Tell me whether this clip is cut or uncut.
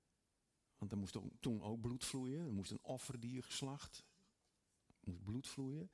uncut